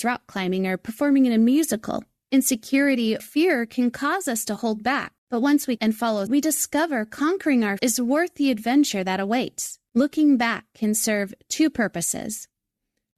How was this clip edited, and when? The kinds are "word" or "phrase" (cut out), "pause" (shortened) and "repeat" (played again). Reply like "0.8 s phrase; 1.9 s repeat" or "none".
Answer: 3.2 s word; 5.2 s pause; 5.8 s word; 6.3 s word; 7.8 s word; 9.9 s pause